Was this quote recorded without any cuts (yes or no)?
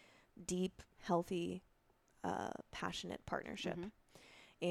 yes